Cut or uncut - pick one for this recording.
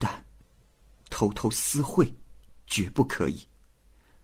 uncut